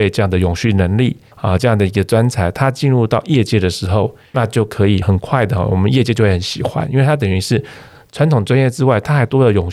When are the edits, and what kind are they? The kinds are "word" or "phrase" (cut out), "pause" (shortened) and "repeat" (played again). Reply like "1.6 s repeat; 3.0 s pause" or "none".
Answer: 4.3 s word

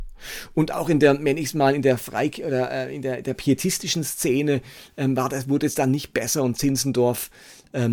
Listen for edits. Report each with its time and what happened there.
none

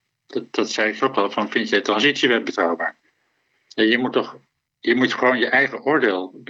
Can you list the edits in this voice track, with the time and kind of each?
1.0 s word

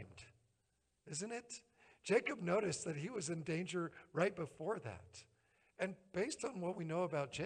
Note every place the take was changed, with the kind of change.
none

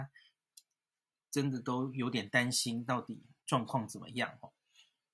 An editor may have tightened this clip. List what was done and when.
3.4 s pause

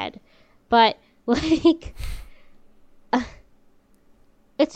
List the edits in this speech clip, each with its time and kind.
none

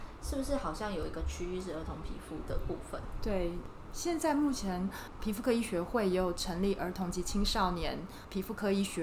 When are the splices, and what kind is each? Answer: 5.2 s word

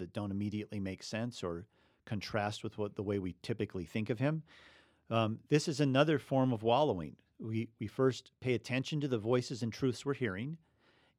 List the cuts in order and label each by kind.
none

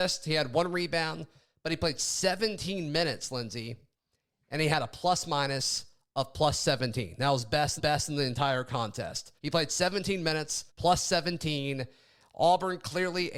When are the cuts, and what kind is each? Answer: 7.8 s repeat; 9.4 s pause; 10.7 s pause

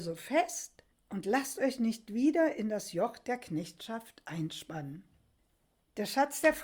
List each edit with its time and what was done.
0.9 s pause

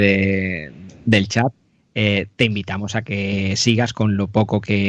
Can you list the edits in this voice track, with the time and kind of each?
none

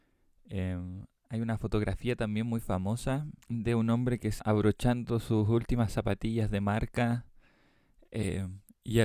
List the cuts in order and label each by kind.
3.4 s pause; 4.4 s word

